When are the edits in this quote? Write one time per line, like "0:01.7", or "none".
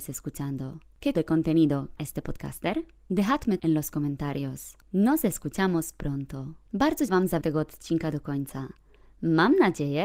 0:01.1
0:02.0
0:03.6
0:07.1
0:07.4